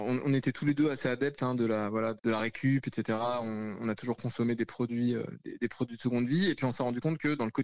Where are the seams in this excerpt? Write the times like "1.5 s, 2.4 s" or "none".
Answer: none